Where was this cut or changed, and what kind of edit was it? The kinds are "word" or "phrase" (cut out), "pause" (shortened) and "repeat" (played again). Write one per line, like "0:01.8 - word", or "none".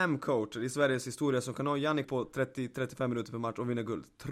0:02.0 - word